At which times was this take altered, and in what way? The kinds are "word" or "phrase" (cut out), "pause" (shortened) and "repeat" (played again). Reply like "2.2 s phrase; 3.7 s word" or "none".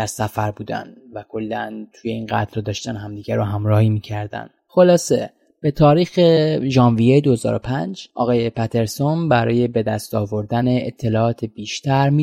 none